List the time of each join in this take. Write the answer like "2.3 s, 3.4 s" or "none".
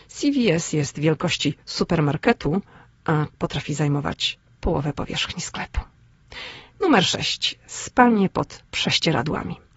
1.6 s, 3.3 s